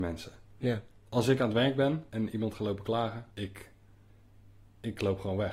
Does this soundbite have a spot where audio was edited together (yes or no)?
yes